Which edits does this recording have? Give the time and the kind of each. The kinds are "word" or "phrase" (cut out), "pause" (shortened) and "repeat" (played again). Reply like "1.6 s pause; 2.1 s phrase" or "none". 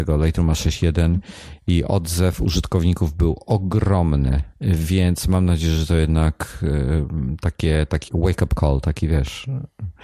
4.5 s pause; 8.1 s word